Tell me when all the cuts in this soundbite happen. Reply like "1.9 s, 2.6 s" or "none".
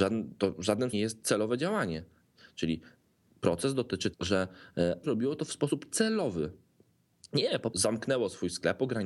0.9 s, 4.1 s, 5.0 s, 7.7 s